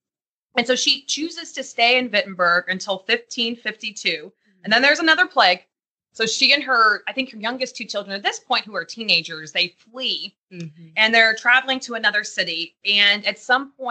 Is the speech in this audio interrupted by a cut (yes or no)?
no